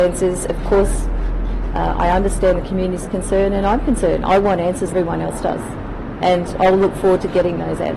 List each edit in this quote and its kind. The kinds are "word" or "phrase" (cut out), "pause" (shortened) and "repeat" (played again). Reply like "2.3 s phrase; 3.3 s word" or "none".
4.9 s word